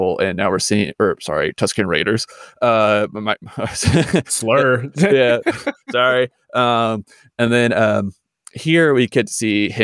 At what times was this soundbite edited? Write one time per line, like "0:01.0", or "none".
none